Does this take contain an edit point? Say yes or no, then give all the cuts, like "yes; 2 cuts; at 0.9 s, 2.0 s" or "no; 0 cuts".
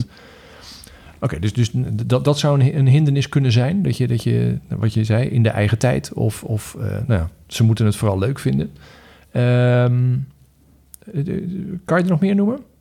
no; 0 cuts